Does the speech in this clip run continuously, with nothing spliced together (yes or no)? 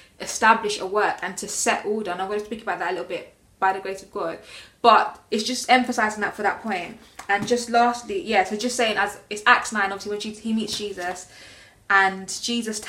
yes